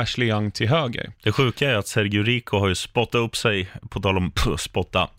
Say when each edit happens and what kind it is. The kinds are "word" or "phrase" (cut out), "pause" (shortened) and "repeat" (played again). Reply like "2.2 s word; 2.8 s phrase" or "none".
none